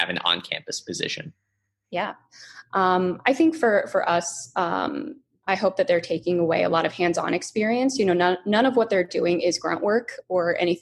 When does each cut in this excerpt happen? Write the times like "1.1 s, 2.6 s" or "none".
none